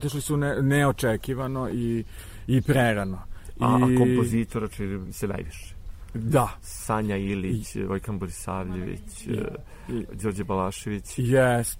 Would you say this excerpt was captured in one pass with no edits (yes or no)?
yes